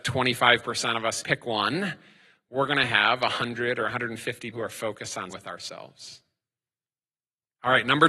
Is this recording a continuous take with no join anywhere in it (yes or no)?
no